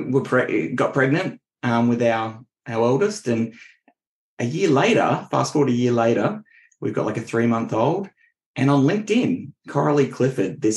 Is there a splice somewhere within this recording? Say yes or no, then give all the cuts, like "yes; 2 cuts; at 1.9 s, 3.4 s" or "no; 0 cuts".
no; 0 cuts